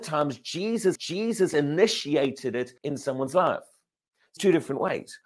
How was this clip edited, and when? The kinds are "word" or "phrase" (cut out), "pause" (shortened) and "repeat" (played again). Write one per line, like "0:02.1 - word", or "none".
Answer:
0:01.0 - repeat
0:02.8 - pause
0:04.4 - word